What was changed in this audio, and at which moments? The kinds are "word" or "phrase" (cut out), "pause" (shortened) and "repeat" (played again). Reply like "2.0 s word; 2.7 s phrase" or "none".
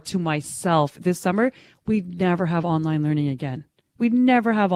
none